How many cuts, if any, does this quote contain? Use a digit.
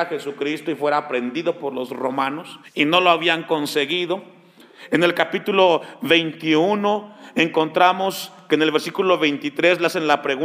1